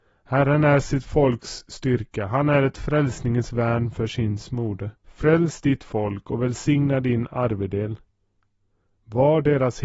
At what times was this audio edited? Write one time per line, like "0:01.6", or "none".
0:04.9